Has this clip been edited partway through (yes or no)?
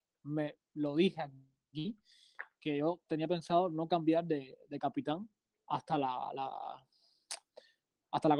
no